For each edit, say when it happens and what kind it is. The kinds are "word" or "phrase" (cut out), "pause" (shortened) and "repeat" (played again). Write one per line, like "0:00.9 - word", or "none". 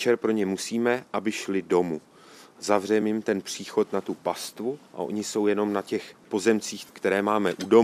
none